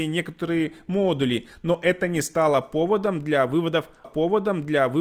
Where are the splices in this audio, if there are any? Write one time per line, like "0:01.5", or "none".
0:04.0